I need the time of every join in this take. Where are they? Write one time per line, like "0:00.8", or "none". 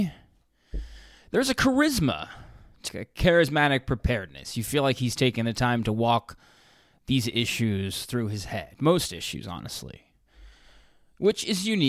0:02.9